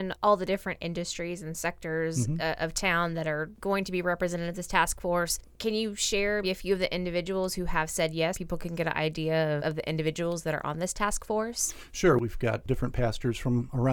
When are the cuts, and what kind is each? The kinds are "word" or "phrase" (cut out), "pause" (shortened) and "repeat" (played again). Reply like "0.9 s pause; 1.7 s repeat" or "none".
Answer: 6.4 s word; 8.3 s word; 9.6 s word